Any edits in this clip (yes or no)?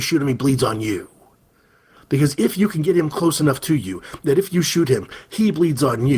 no